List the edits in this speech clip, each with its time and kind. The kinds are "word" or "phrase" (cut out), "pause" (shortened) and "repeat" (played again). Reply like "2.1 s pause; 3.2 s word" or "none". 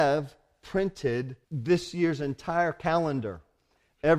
1.4 s pause